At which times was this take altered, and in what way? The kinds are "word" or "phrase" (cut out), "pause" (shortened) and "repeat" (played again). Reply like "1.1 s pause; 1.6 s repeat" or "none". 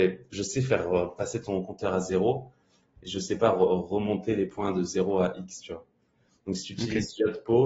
none